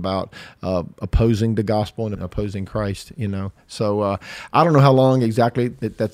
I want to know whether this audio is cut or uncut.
cut